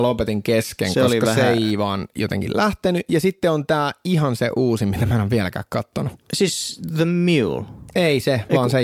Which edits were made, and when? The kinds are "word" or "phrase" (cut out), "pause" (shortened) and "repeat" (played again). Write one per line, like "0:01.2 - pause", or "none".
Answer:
0:06.2 - pause

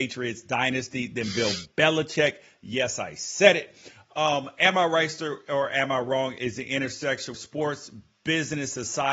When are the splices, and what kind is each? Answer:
0:07.3 - word

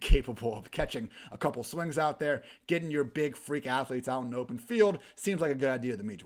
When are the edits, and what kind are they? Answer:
none

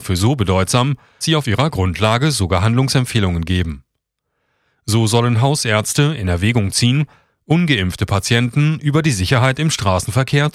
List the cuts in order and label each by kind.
0:01.2 - word

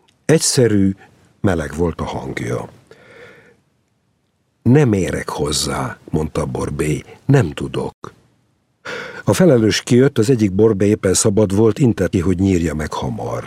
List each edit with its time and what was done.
0:12.1 - word

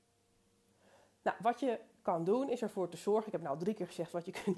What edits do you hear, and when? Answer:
none

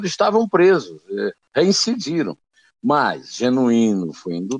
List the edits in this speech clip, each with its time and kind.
none

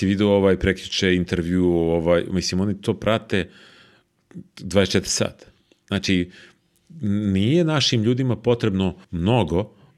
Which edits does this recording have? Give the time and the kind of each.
0:05.6 - pause
0:09.0 - pause

